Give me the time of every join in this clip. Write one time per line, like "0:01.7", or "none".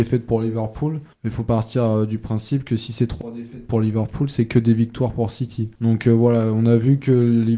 0:01.1
0:05.8